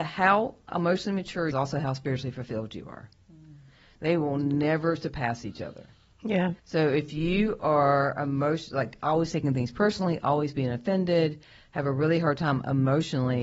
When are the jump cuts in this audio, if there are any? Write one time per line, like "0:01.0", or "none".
0:01.5
0:06.6